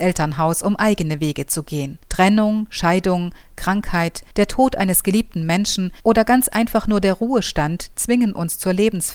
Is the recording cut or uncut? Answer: cut